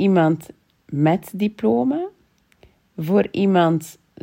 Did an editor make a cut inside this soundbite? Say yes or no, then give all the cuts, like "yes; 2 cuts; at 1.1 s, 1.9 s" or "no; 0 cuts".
no; 0 cuts